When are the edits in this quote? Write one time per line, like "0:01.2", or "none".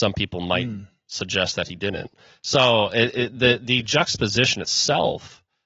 none